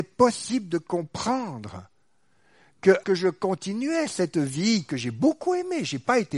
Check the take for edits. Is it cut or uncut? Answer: cut